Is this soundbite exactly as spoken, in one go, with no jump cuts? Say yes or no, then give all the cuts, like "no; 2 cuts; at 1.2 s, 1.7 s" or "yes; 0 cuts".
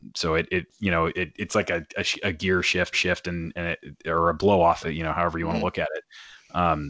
no; 2 cuts; at 2.9 s, 4.8 s